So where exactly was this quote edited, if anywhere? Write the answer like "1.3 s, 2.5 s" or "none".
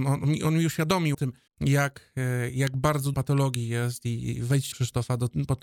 1.1 s, 1.5 s, 3.1 s, 4.7 s